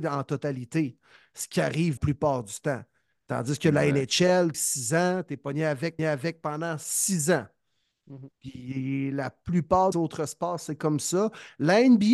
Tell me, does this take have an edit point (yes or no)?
yes